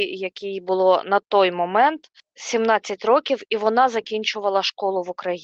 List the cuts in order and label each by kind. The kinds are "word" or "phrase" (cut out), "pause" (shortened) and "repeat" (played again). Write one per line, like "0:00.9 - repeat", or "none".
0:02.2 - pause